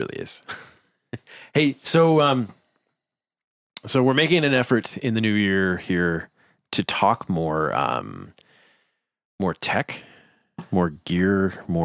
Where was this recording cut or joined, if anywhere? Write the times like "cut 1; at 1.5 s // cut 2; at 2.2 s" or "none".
none

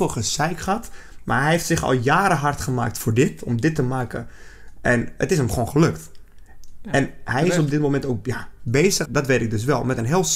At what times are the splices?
cut 1; at 9.0 s

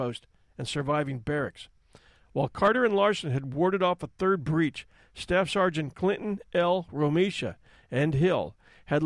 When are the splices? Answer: none

